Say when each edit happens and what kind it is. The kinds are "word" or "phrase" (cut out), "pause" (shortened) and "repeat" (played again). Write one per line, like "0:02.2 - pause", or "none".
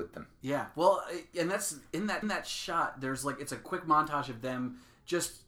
0:02.2 - repeat